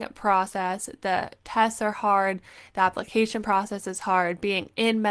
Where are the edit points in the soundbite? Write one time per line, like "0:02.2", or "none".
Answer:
none